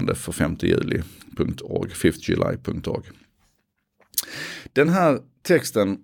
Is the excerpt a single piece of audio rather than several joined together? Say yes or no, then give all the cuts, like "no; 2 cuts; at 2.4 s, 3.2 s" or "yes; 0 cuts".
yes; 0 cuts